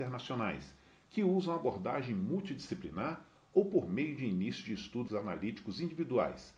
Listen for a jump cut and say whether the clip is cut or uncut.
cut